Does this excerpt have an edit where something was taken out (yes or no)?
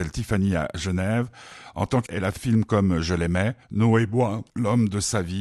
yes